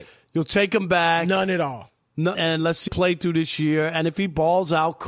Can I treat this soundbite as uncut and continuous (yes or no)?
no